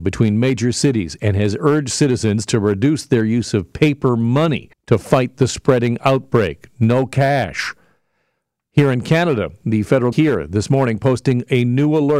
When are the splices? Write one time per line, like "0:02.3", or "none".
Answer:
0:04.7
0:10.1